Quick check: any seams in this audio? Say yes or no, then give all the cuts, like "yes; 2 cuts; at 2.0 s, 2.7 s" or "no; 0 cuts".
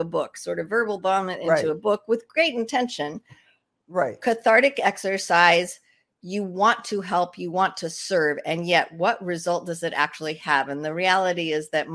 no; 0 cuts